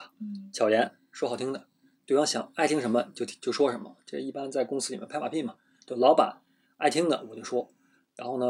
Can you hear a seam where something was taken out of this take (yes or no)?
no